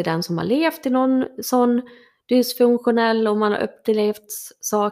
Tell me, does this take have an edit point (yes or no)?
no